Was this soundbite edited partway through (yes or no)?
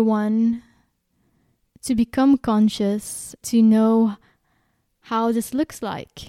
yes